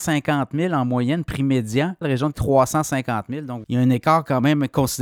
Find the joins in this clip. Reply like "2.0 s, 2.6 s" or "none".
2.0 s, 2.3 s, 3.6 s